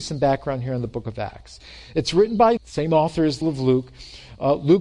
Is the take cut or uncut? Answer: cut